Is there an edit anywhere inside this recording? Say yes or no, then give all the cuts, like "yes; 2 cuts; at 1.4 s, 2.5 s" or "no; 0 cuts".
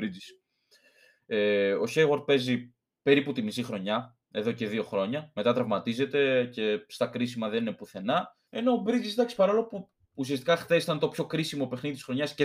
yes; 2 cuts; at 4.2 s, 8.5 s